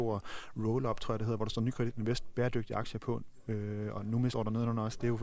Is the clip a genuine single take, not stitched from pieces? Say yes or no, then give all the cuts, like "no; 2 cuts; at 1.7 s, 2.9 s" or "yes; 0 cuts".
no; 1 cut; at 4.3 s